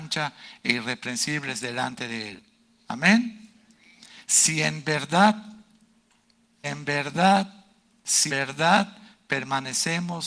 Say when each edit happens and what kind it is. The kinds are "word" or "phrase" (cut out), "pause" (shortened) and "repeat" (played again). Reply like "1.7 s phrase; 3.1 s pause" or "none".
6.6 s word; 8.3 s word